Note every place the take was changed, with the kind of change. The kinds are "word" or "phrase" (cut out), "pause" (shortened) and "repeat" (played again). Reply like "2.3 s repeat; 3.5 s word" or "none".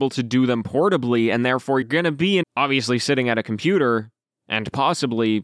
1.8 s word; 2.4 s phrase